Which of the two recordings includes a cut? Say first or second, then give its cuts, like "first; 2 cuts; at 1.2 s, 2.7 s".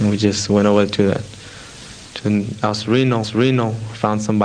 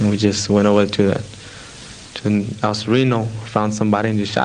first; 1 cut; at 3.2 s